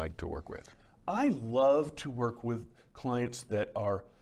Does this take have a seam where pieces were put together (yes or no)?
no